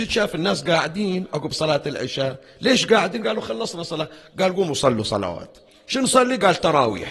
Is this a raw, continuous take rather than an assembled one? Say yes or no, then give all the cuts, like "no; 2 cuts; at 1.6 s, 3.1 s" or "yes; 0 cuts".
yes; 0 cuts